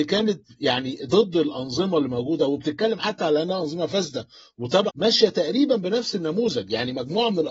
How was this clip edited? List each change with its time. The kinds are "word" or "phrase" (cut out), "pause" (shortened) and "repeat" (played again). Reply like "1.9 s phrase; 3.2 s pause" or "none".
4.9 s word